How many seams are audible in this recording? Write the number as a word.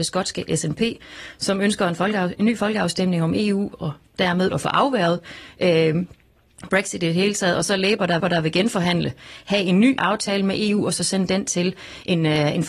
three